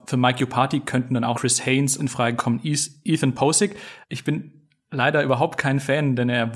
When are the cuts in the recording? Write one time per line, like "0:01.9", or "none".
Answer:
0:01.3
0:02.0
0:04.0